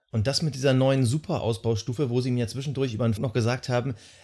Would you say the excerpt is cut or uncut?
cut